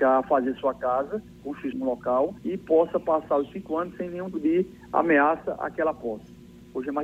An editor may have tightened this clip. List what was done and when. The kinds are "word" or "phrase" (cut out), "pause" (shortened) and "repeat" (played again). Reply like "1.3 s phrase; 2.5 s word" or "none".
1.7 s phrase; 2.4 s pause; 4.3 s word